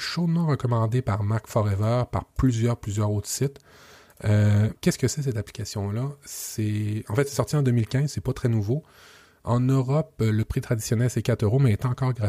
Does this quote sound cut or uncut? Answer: cut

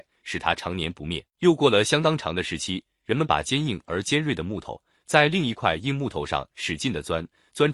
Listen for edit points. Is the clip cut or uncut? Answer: cut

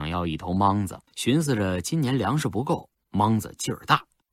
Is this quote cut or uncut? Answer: cut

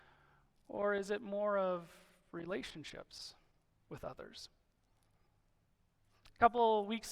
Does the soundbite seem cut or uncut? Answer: uncut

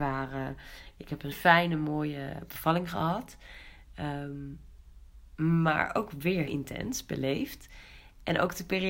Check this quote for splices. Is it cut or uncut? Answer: cut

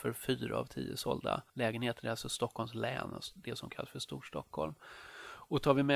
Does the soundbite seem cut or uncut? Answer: cut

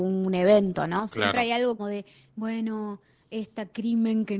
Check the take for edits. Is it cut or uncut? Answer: cut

